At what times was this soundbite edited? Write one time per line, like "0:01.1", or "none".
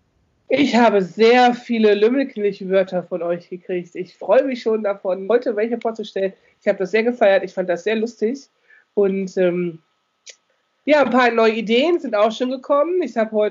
0:05.3